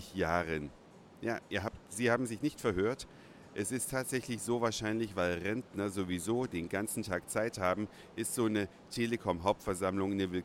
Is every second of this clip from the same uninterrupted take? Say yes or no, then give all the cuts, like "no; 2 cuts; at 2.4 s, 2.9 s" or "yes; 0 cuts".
yes; 0 cuts